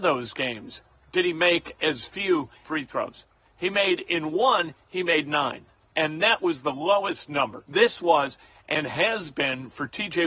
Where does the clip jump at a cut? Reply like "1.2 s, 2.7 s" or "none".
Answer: 2.6 s, 5.8 s, 7.6 s

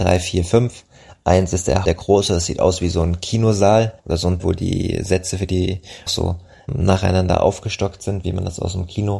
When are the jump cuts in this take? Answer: 1.8 s, 4.0 s, 4.4 s, 6.1 s, 6.7 s

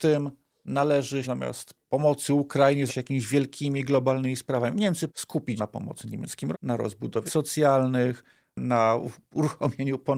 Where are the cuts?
1.2 s, 2.9 s, 5.1 s, 5.6 s, 6.5 s, 7.3 s

